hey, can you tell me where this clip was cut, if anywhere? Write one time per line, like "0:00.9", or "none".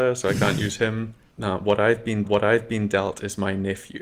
0:02.2